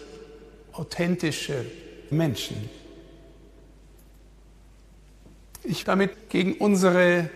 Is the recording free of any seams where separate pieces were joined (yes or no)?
no